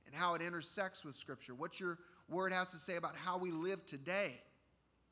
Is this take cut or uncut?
uncut